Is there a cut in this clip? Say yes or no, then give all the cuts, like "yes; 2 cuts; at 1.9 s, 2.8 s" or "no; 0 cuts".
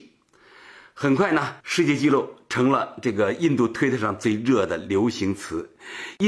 yes; 1 cut; at 1.6 s